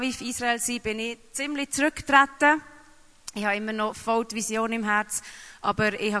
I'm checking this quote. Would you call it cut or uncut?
uncut